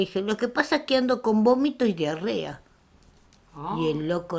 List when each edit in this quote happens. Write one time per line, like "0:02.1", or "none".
none